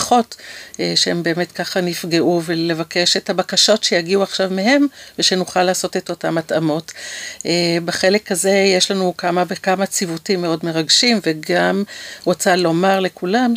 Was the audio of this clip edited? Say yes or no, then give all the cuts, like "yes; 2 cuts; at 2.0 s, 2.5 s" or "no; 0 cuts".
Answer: no; 0 cuts